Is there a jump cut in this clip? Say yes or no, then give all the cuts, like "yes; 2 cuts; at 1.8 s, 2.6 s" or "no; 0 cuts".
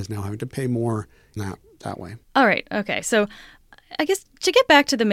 yes; 2 cuts; at 1.4 s, 2.2 s